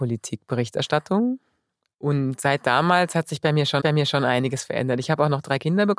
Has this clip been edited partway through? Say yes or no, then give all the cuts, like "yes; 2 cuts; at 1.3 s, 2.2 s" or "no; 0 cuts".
yes; 1 cut; at 3.8 s